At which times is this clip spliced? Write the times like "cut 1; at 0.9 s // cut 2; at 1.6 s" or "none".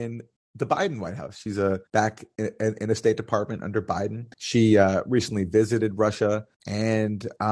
cut 1; at 1.9 s // cut 2; at 4.3 s // cut 3; at 6.5 s